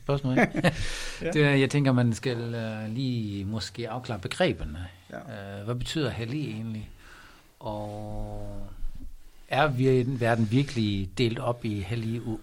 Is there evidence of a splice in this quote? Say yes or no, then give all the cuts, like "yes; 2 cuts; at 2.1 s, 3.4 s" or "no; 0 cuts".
no; 0 cuts